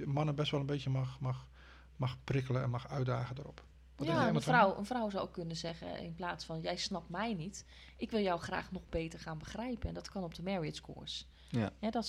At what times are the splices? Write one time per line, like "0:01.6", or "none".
none

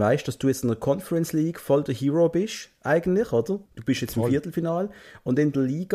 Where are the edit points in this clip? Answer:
0:03.7

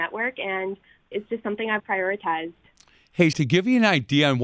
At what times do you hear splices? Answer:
0:01.1
0:01.8
0:03.3

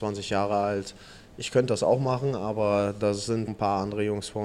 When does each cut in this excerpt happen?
0:03.5

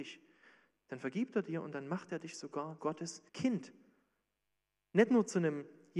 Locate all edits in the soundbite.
0:02.8
0:03.3

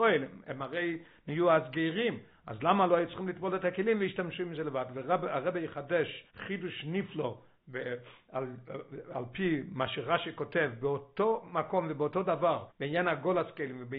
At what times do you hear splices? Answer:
0:06.3
0:12.7

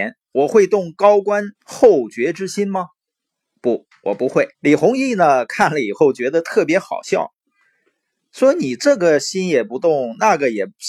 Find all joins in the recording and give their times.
0:01.5
0:04.5

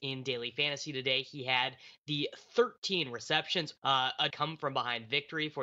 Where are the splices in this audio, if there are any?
0:03.8
0:04.3

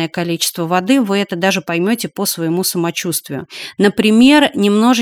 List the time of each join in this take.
none

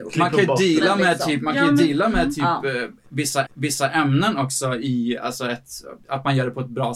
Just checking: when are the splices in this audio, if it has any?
0:03.5

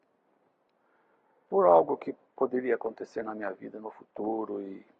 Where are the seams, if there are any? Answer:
0:02.3

